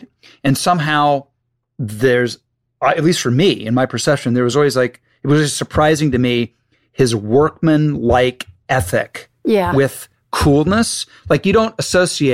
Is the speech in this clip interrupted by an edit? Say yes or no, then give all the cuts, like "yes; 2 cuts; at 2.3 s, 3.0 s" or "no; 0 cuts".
no; 0 cuts